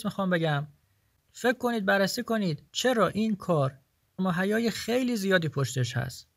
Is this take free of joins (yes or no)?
no